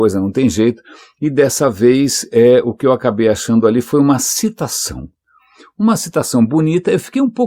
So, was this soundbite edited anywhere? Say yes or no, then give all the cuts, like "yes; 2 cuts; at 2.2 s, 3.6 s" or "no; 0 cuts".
no; 0 cuts